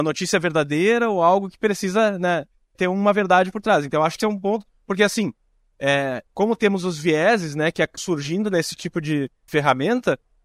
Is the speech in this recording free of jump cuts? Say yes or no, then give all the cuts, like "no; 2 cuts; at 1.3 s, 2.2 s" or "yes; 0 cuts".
no; 4 cuts; at 2.7 s, 4.2 s, 8.0 s, 9.5 s